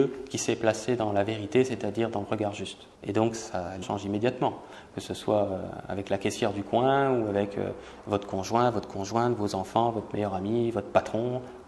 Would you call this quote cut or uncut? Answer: cut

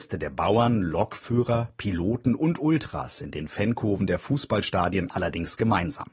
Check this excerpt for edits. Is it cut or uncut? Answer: uncut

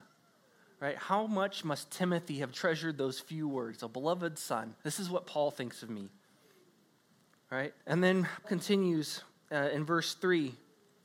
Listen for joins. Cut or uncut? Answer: cut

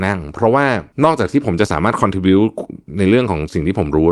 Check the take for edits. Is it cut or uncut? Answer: cut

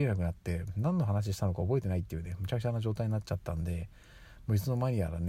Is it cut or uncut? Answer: uncut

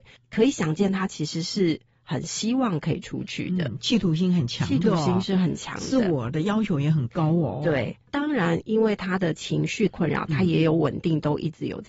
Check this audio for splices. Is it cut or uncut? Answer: uncut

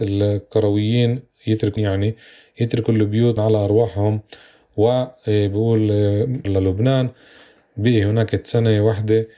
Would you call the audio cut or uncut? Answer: cut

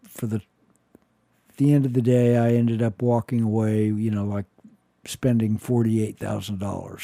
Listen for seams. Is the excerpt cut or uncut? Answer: uncut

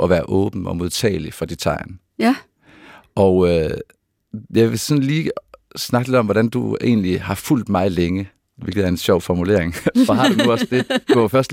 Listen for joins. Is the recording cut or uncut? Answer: uncut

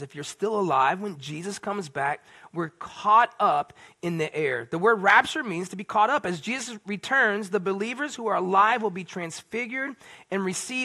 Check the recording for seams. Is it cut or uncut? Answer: uncut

